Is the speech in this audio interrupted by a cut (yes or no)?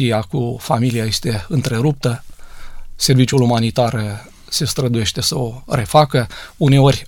no